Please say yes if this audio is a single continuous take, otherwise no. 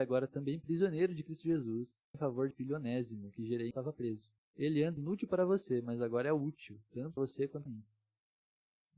no